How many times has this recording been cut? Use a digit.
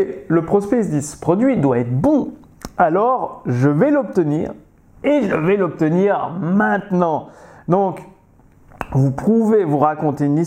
0